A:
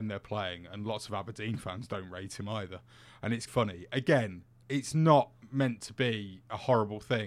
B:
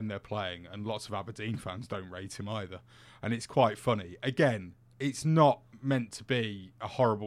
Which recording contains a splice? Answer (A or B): A